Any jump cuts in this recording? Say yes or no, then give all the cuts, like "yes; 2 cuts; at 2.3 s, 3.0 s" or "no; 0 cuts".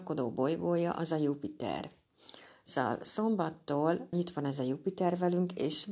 yes; 1 cut; at 4.1 s